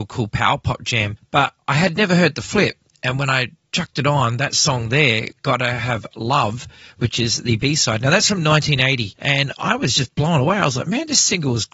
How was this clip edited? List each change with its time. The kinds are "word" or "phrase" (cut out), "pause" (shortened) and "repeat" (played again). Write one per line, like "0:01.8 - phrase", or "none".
none